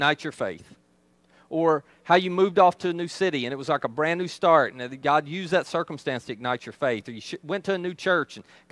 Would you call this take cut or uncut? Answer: uncut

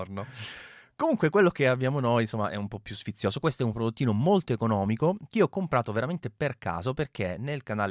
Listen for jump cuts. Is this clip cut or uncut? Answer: uncut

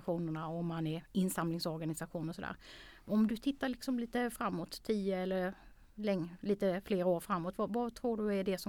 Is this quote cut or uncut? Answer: uncut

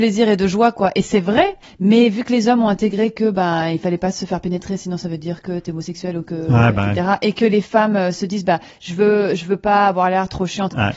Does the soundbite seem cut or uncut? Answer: uncut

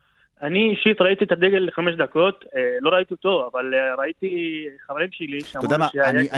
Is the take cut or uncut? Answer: uncut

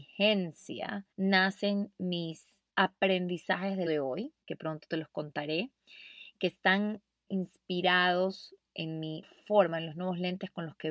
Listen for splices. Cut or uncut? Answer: cut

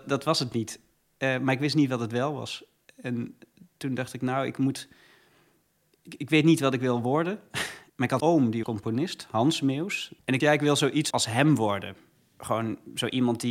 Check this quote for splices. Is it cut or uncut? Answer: cut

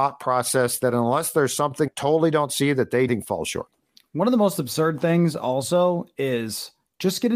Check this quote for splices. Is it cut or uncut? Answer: cut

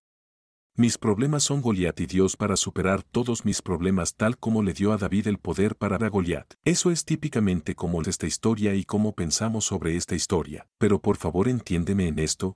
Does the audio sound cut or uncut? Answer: cut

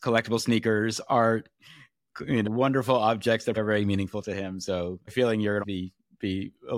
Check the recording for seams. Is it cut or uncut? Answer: cut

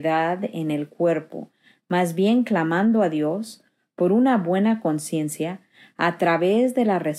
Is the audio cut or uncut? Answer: uncut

